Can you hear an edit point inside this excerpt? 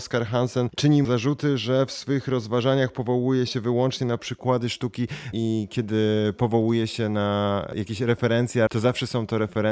yes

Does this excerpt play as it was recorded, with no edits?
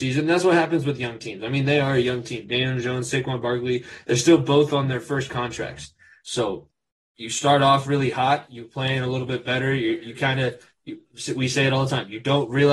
yes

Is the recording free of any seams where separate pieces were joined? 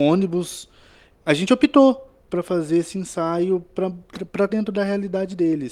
no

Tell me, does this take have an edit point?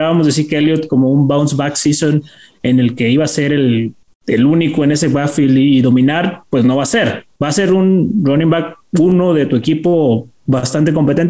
no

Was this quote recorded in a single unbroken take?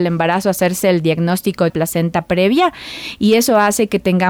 no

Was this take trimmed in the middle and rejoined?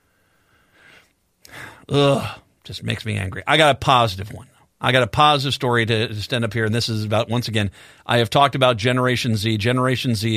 no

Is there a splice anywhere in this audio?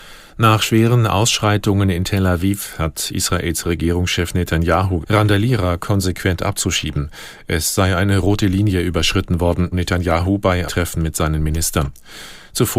yes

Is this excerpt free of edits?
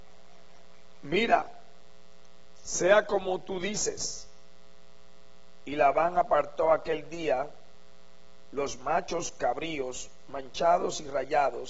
yes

